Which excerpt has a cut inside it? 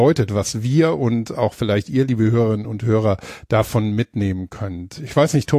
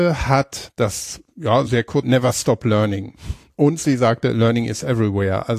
second; 2 cuts; at 1.7 s, 2.0 s

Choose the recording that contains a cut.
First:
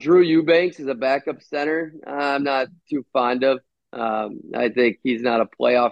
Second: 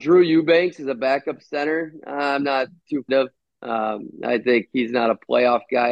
second; 1 cut; at 3.1 s

